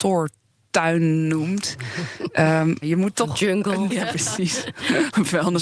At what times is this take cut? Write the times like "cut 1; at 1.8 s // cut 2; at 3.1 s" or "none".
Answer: cut 1; at 2.8 s // cut 2; at 3.9 s